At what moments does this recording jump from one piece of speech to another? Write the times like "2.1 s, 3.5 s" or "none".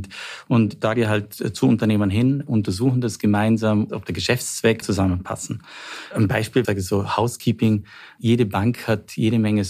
1.0 s, 4.8 s, 6.6 s